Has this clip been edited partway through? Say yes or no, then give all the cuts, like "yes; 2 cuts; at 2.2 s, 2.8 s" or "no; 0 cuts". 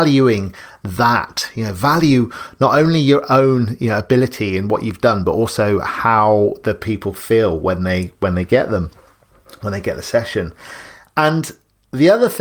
no; 0 cuts